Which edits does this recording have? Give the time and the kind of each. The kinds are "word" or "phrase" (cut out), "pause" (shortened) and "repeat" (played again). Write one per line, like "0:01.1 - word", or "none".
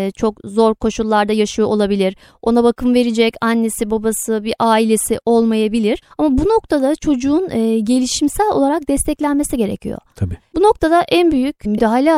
none